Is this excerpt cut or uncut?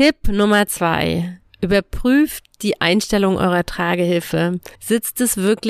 cut